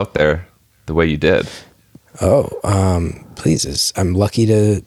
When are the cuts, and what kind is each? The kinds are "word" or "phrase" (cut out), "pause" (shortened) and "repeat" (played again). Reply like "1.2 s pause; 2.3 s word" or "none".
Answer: none